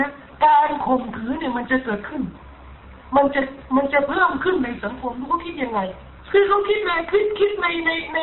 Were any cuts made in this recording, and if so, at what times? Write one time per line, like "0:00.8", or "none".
0:06.2